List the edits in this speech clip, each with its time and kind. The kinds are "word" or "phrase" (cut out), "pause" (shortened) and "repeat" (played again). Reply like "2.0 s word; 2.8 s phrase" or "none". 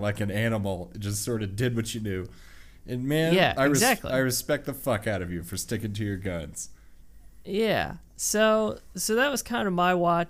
none